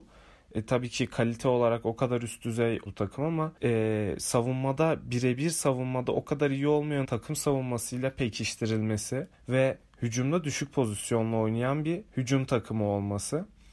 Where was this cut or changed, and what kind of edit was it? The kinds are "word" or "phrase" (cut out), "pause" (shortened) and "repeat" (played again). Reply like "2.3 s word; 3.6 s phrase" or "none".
2.9 s word; 3.6 s pause; 7.0 s word; 9.3 s pause; 12.1 s pause